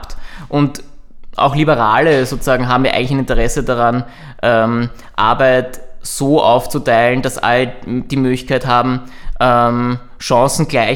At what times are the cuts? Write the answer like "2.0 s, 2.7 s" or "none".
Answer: none